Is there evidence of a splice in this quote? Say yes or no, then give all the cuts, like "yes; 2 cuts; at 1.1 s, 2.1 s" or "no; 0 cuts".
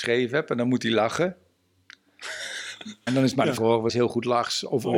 yes; 3 cuts; at 3.1 s, 3.6 s, 3.9 s